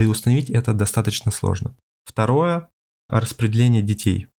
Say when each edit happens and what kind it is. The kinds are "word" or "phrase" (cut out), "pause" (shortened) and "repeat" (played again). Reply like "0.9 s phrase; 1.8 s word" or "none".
1.9 s pause; 3.1 s word